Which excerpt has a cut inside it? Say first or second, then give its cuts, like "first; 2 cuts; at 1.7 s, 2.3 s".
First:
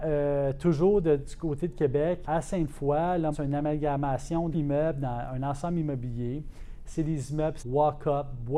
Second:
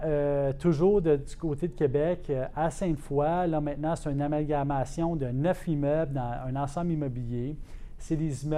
first; 4 cuts; at 2.2 s, 3.3 s, 4.5 s, 7.6 s